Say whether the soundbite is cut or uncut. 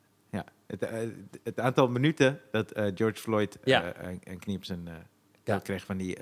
uncut